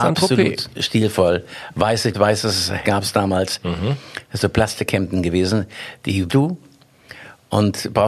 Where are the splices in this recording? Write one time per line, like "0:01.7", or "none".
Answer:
0:02.1
0:02.8
0:04.4
0:06.3